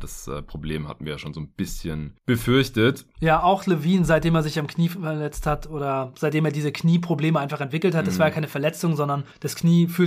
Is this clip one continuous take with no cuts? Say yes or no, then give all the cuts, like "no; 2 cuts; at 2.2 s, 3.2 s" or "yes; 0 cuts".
yes; 0 cuts